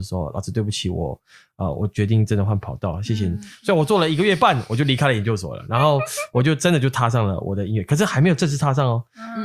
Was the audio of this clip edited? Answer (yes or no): no